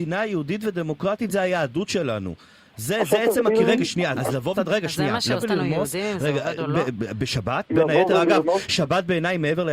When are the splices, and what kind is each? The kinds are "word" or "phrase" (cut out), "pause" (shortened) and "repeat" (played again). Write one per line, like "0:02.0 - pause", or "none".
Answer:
0:04.1 - word
0:04.5 - word
0:05.4 - word